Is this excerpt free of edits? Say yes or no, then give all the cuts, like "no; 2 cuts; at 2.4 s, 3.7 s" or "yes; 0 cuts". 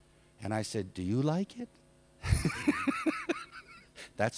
yes; 0 cuts